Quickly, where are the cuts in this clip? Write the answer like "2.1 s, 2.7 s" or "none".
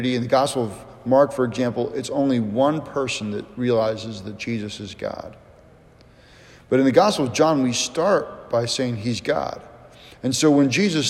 none

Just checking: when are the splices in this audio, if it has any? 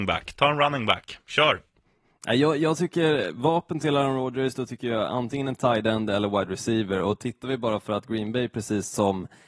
none

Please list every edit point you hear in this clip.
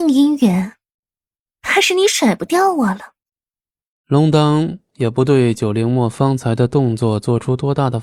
none

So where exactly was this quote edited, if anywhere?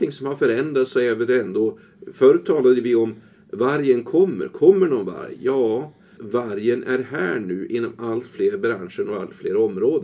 6.2 s

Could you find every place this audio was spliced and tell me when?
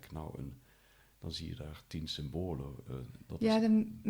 none

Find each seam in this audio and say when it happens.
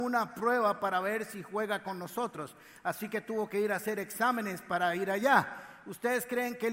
none

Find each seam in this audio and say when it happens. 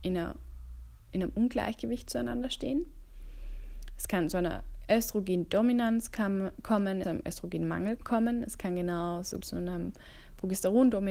7.0 s, 8.0 s, 9.4 s

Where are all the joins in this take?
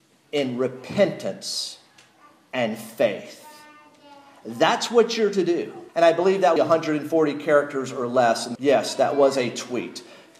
5.9 s, 6.6 s, 8.6 s

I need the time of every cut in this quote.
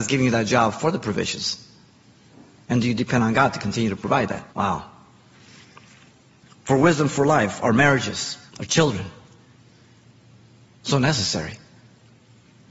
4.5 s, 8.5 s

